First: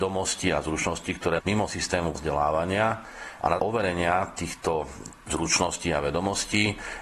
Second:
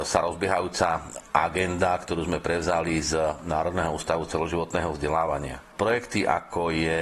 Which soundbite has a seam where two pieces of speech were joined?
first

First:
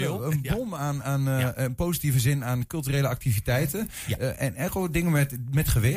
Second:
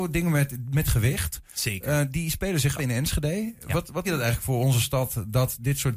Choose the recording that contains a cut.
second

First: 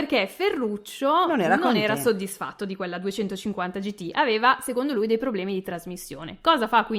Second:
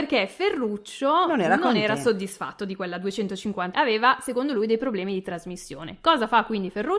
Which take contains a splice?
second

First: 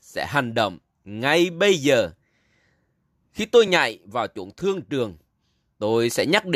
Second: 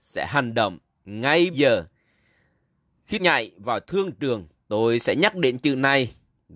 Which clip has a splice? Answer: second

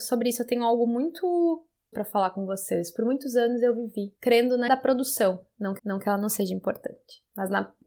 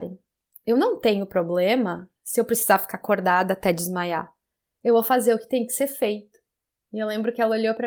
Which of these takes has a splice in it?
first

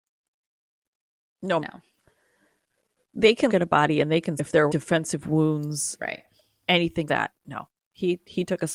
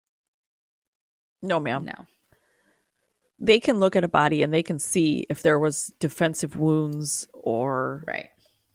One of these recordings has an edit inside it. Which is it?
first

